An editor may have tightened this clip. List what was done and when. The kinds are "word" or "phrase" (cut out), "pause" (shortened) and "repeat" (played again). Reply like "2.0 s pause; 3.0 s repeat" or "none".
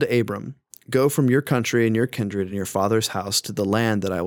none